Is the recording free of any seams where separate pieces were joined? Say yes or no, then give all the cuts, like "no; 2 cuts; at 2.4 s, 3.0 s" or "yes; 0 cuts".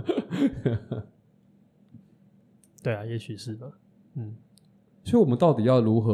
yes; 0 cuts